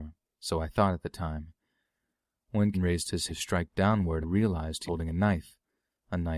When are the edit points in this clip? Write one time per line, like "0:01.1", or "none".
0:02.7
0:03.3
0:04.2
0:04.9